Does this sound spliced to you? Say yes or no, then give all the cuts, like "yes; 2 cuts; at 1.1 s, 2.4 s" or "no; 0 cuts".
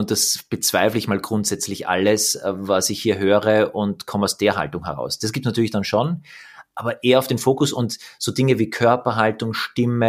no; 0 cuts